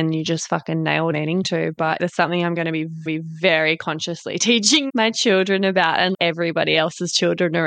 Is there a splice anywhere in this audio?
yes; 5 cuts; at 1.1 s, 2.0 s, 3.1 s, 4.9 s, 6.1 s

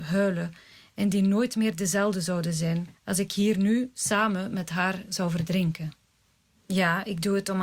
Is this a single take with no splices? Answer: yes; 0 cuts

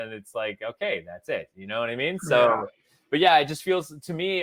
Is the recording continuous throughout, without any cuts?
yes; 0 cuts

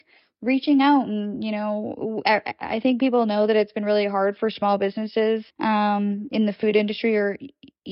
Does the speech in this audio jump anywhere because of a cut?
yes; 1 cut; at 5.5 s

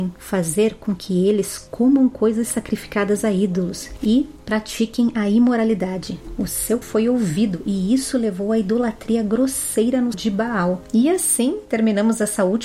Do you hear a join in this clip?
yes; 2 cuts; at 6.8 s, 10.1 s

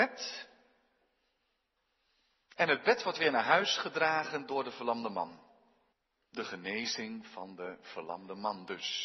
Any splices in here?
yes; 1 cut; at 5.9 s

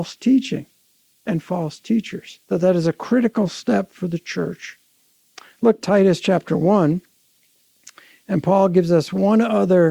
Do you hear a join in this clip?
yes; 2 cuts; at 2.4 s, 5.8 s

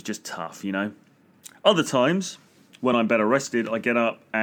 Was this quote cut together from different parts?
no; 0 cuts

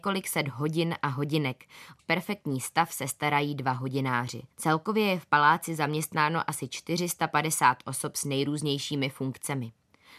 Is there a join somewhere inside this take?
yes; 2 cuts; at 2.0 s, 4.5 s

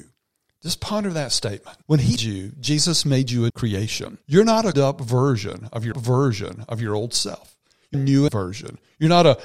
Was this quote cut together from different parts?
yes; 8 cuts; at 1.8 s, 2.2 s, 3.5 s, 4.2 s, 4.7 s, 5.9 s, 7.9 s, 8.3 s

